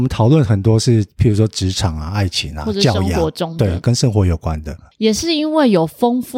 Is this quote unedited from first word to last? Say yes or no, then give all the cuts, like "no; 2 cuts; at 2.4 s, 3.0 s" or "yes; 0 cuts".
yes; 0 cuts